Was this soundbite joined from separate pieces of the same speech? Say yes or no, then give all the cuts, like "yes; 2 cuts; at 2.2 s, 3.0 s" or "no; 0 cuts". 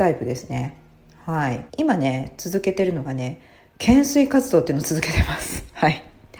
yes; 1 cut; at 1.7 s